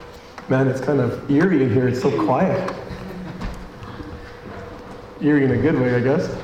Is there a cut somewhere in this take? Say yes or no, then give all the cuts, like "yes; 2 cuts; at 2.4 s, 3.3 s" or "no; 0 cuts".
no; 0 cuts